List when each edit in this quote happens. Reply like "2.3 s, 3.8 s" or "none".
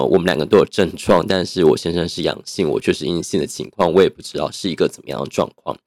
none